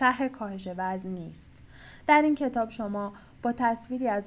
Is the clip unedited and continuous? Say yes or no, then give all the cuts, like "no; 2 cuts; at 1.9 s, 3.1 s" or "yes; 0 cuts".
yes; 0 cuts